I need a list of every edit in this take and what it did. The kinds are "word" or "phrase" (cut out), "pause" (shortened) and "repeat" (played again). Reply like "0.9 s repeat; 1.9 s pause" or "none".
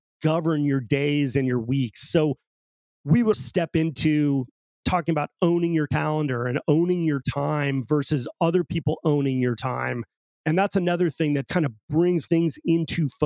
3.3 s word; 11.5 s word; 12.3 s word